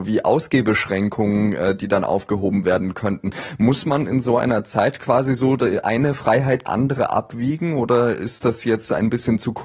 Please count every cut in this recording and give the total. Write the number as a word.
one